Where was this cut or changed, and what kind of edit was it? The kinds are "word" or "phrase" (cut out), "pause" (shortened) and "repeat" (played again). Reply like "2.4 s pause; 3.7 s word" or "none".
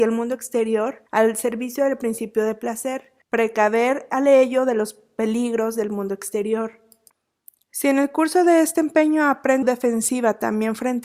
1.1 s pause; 3.2 s pause; 9.6 s phrase